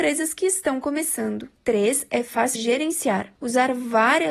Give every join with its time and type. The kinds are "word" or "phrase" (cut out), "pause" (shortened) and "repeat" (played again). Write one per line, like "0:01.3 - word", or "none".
0:02.5 - word
0:03.4 - pause

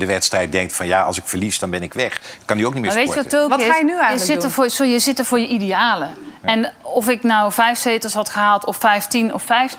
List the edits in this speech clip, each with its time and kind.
none

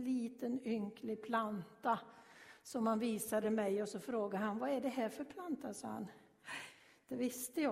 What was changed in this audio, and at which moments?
none

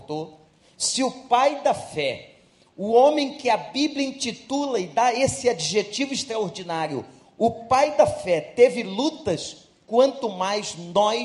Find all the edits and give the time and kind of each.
none

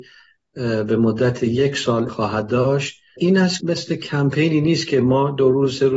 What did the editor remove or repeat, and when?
0:02.1 - word
0:03.6 - phrase

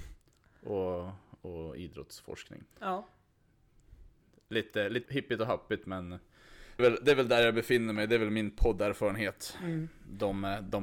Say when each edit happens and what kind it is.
0:02.7 - pause
0:05.1 - word
0:06.8 - phrase

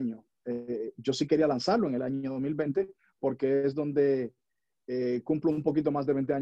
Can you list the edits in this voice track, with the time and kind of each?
none

